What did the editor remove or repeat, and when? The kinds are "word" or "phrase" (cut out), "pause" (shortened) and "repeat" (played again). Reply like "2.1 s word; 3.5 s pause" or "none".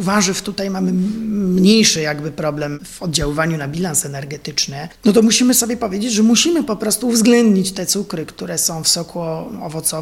none